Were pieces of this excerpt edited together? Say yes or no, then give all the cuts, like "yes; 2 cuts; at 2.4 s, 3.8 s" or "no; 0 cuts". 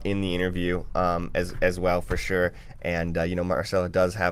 no; 0 cuts